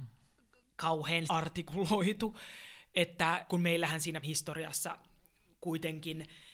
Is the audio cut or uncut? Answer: cut